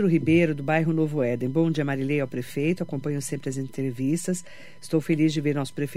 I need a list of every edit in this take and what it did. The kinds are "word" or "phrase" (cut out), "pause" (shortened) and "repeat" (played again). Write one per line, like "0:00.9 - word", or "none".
none